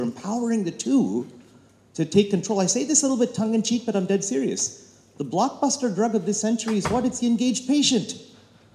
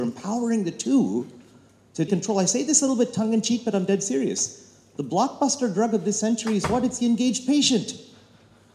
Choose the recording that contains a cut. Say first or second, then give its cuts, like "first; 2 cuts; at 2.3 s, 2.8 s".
second; 1 cut; at 2.1 s